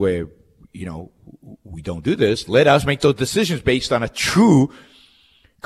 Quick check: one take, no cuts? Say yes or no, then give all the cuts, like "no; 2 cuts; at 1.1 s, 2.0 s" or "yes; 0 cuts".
yes; 0 cuts